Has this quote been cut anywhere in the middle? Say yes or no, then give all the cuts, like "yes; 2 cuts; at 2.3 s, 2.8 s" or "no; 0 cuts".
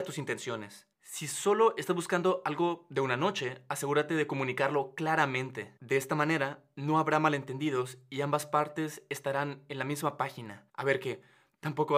yes; 2 cuts; at 0.9 s, 10.7 s